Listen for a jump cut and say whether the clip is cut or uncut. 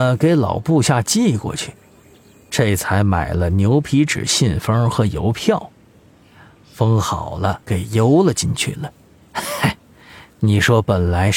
cut